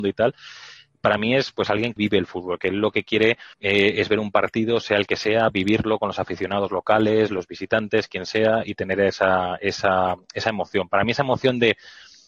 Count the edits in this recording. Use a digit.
2